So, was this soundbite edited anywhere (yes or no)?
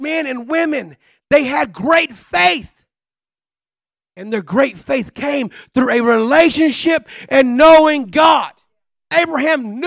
no